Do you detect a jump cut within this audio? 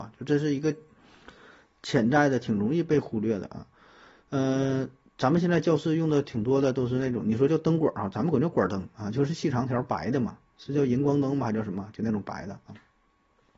no; 0 cuts

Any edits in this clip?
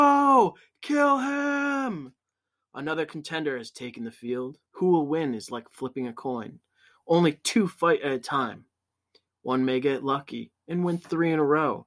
yes; 1 cut; at 4.7 s

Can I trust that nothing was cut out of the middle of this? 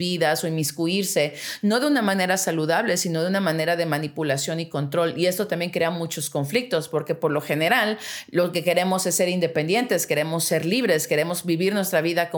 yes; 0 cuts

